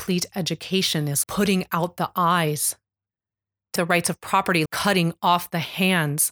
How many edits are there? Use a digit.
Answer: 3